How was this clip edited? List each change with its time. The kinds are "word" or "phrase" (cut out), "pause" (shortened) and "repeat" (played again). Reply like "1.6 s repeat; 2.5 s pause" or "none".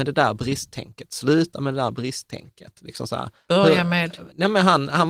none

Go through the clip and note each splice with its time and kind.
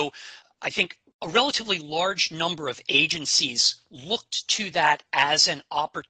none

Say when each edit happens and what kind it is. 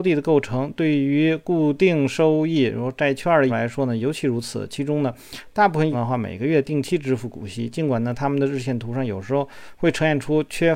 3.5 s word; 5.9 s word

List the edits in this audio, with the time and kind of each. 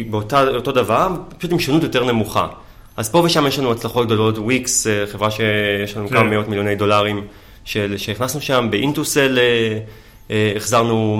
none

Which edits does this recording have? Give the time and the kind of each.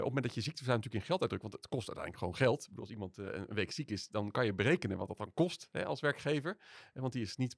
none

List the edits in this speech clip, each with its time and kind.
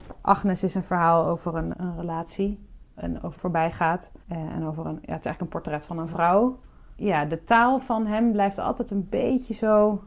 1.7 s word; 3.4 s phrase; 4.2 s pause

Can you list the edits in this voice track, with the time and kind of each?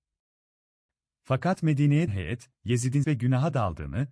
2.1 s word; 3.0 s word

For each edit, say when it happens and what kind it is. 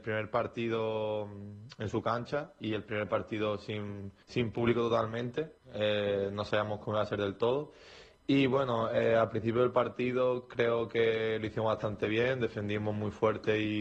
4.2 s pause; 5.6 s pause

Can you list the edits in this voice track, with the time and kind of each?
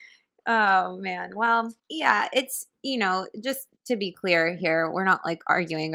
1.8 s pause; 3.7 s pause

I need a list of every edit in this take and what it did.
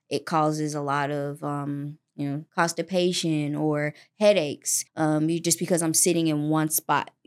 2.5 s pause; 4.9 s pause

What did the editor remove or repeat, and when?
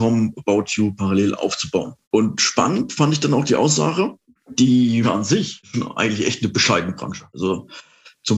2.0 s pause; 5.0 s word

